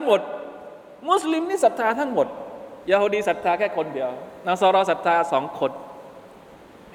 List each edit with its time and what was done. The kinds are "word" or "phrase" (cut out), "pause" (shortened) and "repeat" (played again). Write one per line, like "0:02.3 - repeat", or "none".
0:02.8 - pause